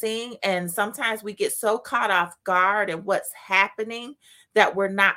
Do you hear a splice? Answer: no; 0 cuts

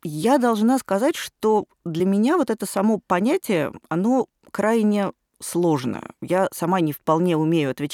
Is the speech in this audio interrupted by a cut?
no; 0 cuts

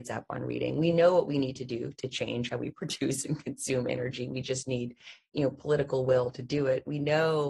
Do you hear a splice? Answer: no; 0 cuts

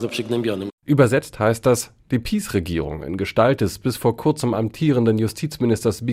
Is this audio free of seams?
yes; 0 cuts

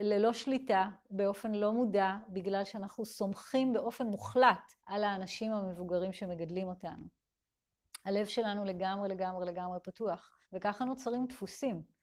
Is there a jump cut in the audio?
yes; 2 cuts; at 4.8 s, 10.4 s

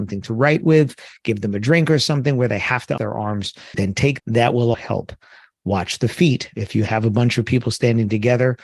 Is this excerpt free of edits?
no; 4 cuts; at 3.0 s, 3.7 s, 4.2 s, 4.7 s

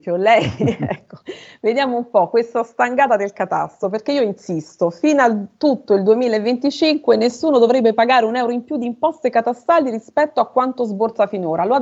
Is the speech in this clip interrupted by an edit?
no; 0 cuts

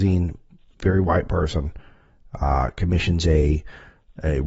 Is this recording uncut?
yes; 0 cuts

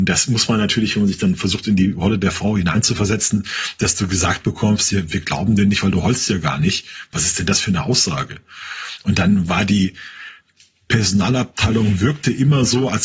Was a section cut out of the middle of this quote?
no; 0 cuts

